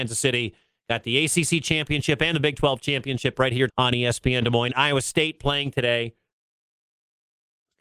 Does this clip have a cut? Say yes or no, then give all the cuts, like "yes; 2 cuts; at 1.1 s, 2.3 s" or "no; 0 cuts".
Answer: yes; 1 cut; at 3.7 s